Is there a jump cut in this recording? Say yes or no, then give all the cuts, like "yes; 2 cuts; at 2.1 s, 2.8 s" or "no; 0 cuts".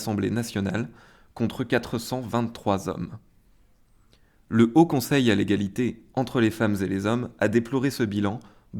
no; 0 cuts